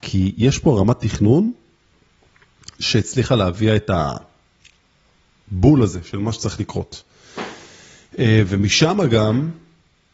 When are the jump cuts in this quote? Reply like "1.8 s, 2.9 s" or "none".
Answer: none